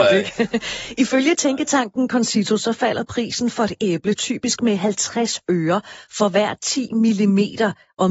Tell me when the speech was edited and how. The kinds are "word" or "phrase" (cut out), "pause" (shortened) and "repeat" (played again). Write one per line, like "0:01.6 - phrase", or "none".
none